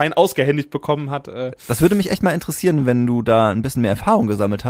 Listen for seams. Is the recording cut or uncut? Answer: uncut